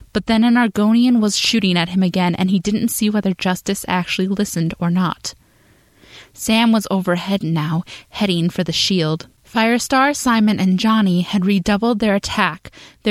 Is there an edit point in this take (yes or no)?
yes